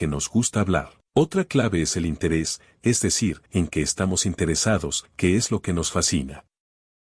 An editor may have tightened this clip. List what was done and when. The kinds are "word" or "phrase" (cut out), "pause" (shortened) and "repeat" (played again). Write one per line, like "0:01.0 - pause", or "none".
0:01.1 - pause
0:03.5 - pause
0:05.1 - pause